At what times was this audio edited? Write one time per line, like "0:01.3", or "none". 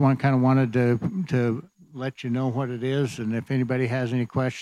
none